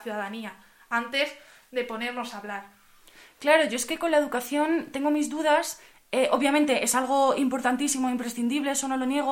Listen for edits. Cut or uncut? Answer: uncut